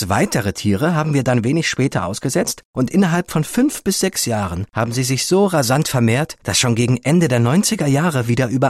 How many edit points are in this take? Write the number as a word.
zero